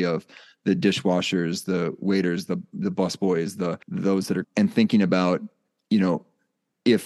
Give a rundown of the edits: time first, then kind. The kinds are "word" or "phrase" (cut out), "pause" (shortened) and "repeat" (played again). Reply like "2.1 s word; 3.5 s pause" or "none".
3.8 s pause; 4.4 s phrase